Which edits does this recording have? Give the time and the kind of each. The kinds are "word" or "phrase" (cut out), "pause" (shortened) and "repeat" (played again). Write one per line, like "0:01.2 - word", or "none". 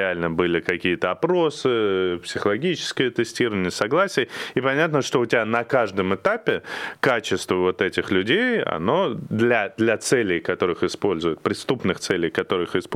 none